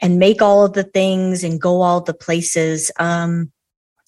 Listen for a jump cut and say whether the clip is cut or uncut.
uncut